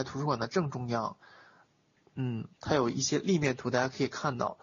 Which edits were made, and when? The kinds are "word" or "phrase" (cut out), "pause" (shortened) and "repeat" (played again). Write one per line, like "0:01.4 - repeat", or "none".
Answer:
none

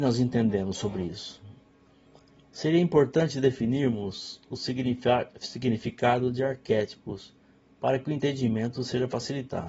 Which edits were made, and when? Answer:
none

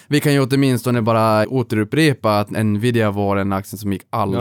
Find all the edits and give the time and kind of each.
0:01.4 - word

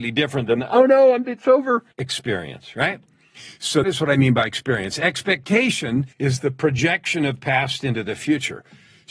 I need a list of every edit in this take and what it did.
0:01.2 - word
0:01.9 - pause
0:03.8 - word
0:06.1 - pause

